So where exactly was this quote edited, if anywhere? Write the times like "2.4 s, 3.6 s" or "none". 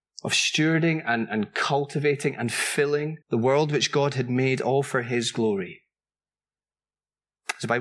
3.2 s